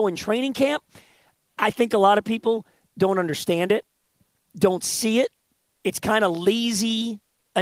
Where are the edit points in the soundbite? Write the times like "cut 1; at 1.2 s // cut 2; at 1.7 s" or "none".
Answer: cut 1; at 5.8 s